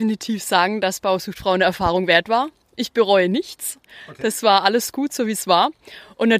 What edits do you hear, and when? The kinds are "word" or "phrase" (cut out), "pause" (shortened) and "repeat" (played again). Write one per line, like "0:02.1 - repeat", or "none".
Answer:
none